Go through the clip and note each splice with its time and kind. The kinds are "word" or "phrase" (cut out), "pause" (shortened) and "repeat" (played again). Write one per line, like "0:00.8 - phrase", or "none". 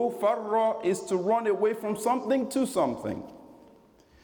none